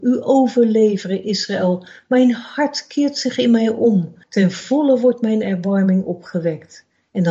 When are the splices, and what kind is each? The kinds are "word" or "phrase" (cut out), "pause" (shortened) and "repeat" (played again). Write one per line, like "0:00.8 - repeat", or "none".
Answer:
0:04.2 - pause